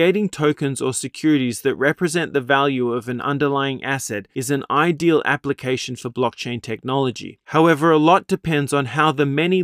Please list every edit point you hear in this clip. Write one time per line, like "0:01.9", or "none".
0:07.4